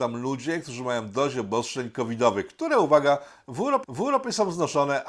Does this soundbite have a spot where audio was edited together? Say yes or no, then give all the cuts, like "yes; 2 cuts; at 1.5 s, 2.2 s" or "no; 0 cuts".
yes; 1 cut; at 3.8 s